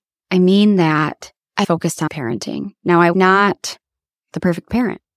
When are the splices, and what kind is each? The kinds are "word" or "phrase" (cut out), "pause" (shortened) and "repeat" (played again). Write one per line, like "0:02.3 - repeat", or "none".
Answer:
0:01.6 - word
0:02.1 - word
0:03.1 - word

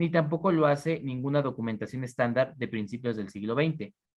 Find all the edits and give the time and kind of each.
none

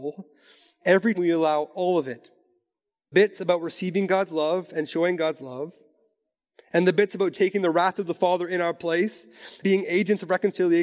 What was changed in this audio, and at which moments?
0:01.1 - word
0:03.1 - word
0:07.3 - word
0:09.6 - word

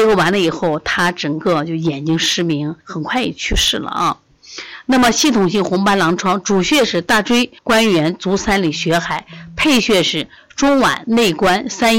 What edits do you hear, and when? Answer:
0:02.8 - pause
0:07.6 - pause

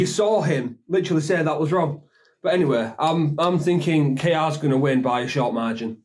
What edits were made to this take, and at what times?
none

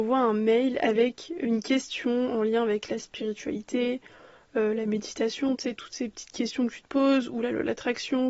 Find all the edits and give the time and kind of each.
none

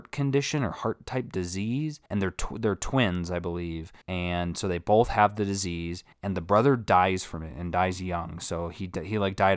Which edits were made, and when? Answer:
0:02.1 - pause
0:04.0 - pause
0:06.1 - pause

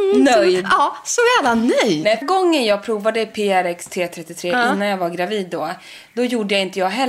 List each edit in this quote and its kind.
0:02.2 - phrase

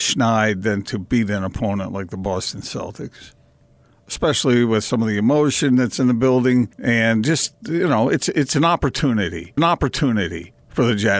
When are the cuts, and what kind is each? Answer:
0:06.7 - pause
0:09.6 - repeat

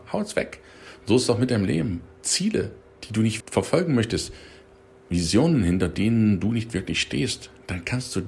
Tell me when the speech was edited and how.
0:03.4 - word

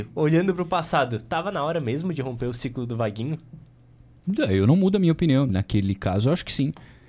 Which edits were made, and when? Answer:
0:05.5 - word

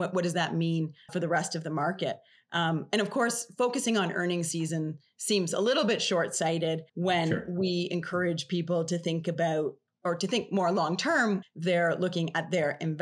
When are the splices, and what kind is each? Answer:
0:01.1 - word
0:06.9 - pause
0:09.9 - word
0:11.4 - word

